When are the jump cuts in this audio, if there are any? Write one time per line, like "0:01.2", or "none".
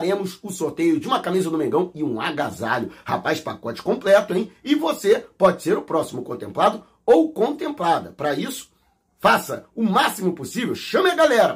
none